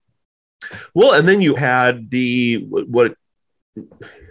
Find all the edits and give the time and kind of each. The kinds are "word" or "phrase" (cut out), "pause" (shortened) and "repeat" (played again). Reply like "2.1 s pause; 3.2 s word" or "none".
1.6 s word